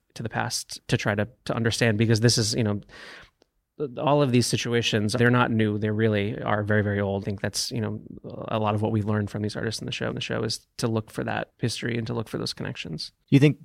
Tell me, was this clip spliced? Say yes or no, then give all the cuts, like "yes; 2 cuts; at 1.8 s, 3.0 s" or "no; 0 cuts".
yes; 2 cuts; at 7.2 s, 10.1 s